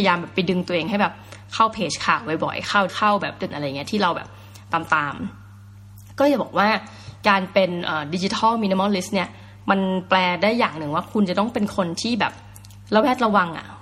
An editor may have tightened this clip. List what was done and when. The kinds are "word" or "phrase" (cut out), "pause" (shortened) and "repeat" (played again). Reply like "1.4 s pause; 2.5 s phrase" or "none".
2.9 s phrase; 3.5 s word